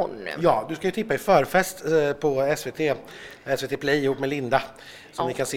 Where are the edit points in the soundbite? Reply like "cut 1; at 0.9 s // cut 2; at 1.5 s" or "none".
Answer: none